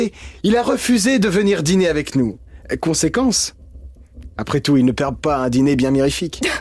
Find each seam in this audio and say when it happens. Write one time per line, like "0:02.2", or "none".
none